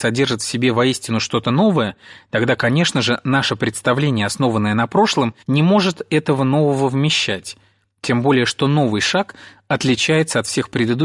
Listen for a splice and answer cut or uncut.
cut